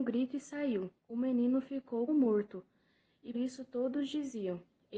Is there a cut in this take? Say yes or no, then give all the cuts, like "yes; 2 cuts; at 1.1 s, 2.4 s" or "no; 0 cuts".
yes; 3 cuts; at 1.0 s, 2.1 s, 3.3 s